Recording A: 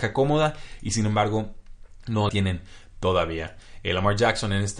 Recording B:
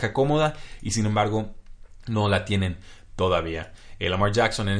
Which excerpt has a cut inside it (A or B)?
A